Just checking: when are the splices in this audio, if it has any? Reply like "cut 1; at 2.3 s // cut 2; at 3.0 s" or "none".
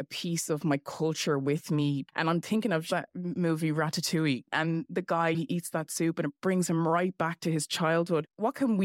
none